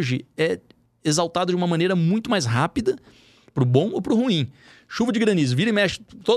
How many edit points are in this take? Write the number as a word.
zero